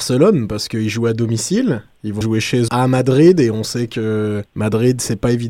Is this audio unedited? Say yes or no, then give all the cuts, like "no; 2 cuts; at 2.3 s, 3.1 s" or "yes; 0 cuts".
no; 3 cuts; at 2.2 s, 2.7 s, 4.5 s